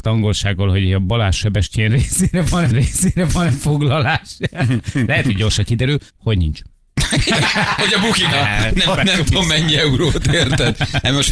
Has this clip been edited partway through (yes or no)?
yes